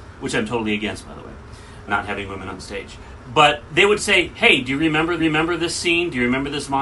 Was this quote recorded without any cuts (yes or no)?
no